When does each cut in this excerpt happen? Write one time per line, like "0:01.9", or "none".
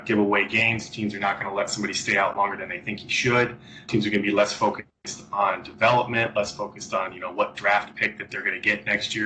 0:03.9